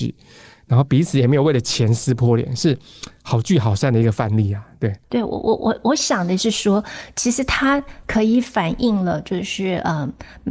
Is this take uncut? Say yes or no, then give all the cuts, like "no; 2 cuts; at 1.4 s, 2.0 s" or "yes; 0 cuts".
no; 1 cut; at 5.0 s